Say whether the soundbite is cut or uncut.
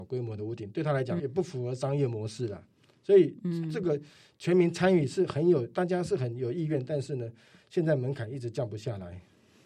cut